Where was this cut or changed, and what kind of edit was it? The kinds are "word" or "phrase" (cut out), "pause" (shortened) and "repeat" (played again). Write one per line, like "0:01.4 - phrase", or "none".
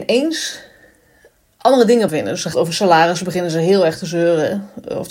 0:02.1 - phrase
0:02.5 - phrase